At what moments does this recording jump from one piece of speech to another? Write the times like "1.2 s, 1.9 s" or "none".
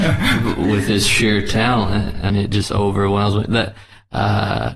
2.3 s